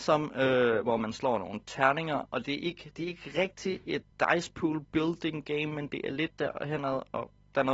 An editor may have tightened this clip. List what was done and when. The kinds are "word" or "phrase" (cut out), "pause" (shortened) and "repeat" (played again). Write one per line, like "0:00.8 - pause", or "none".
0:04.1 - pause